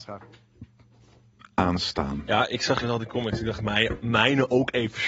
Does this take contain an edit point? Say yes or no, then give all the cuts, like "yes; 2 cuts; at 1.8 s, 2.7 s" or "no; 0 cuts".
yes; 2 cuts; at 2.8 s, 3.6 s